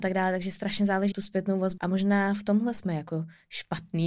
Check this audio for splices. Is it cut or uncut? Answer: cut